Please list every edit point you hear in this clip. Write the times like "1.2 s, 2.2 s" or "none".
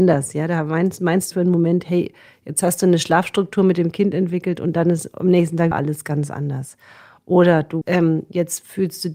1.3 s, 5.7 s, 7.8 s